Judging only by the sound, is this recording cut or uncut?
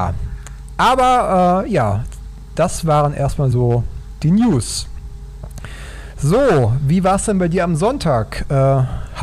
uncut